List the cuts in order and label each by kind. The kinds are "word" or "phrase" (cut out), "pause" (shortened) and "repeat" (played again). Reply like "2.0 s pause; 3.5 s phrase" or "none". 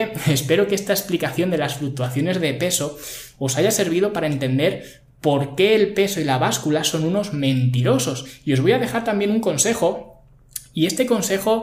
none